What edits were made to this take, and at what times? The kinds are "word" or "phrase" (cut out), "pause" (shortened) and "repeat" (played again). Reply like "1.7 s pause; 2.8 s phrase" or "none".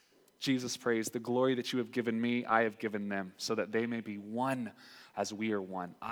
none

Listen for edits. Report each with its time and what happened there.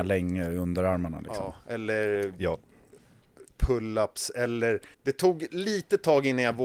4.9 s pause

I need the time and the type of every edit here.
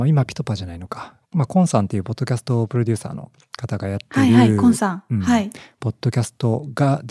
1.2 s pause

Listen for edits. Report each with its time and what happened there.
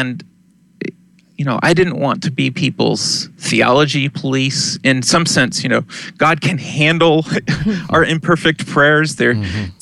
none

